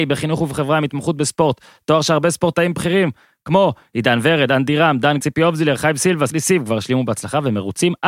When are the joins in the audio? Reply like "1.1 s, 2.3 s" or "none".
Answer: 5.2 s, 6.3 s